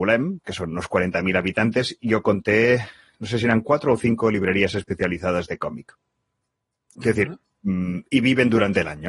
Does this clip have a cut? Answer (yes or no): no